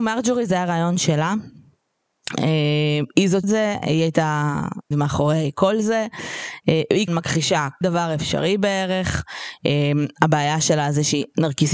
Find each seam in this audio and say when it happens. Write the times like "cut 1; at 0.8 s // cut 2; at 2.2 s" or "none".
cut 1; at 3.4 s // cut 2; at 4.9 s // cut 3; at 7.1 s // cut 4; at 7.8 s